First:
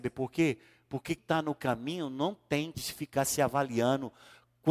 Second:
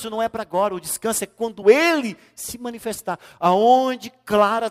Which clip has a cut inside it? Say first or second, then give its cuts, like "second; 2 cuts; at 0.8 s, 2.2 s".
first; 2 cuts; at 1.2 s, 2.7 s